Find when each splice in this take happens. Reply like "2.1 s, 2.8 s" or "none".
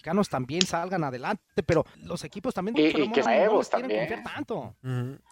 1.9 s, 2.7 s, 3.3 s